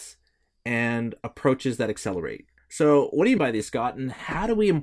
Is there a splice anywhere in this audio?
yes; 2 cuts; at 2.6 s, 3.4 s

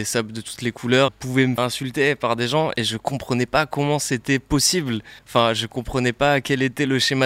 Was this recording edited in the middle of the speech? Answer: yes; 3 cuts; at 1.1 s, 1.6 s, 5.2 s

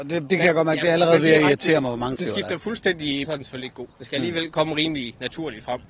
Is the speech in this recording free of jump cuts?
no; 3 cuts; at 2.2 s, 3.2 s, 3.9 s

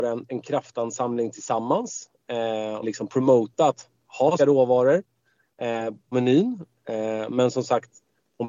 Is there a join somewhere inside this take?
yes; 3 cuts; at 2.8 s, 4.4 s, 6.1 s

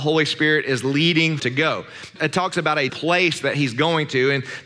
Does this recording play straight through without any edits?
no; 3 cuts; at 1.4 s, 2.2 s, 2.9 s

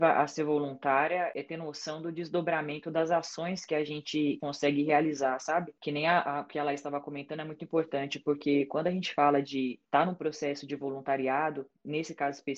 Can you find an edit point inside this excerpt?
yes; 1 cut; at 9.8 s

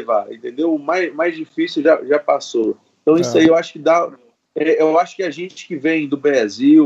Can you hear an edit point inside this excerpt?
no; 0 cuts

